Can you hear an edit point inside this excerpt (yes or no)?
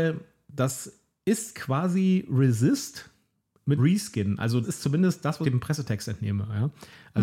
yes